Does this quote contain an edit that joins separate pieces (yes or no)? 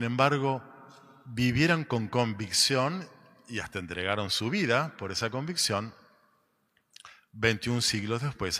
no